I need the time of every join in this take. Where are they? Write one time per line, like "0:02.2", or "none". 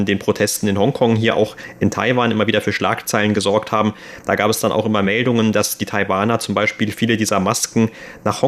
none